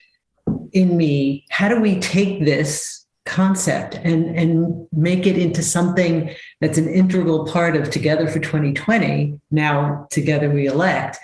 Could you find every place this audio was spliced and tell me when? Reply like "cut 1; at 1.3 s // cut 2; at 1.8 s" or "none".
none